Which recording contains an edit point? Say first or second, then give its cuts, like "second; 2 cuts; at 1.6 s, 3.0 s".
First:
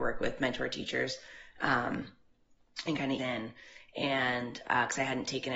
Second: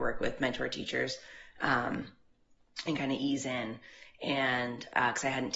first; 1 cut; at 3.2 s